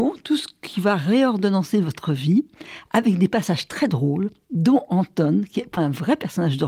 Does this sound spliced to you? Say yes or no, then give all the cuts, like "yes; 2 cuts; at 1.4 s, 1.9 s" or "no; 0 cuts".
yes; 1 cut; at 5.8 s